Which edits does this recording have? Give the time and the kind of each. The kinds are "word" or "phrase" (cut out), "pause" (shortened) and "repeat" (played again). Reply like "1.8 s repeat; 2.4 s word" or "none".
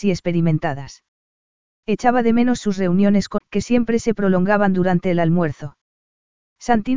3.4 s word